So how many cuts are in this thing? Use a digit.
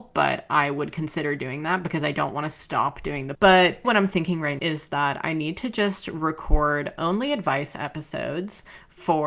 3